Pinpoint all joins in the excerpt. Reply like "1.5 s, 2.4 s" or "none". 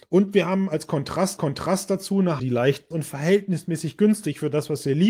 1.4 s, 2.4 s, 2.9 s